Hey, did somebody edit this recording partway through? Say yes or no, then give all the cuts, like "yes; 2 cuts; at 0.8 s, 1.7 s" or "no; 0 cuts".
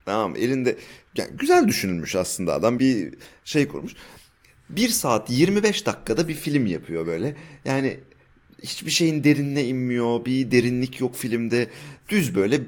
yes; 1 cut; at 2.8 s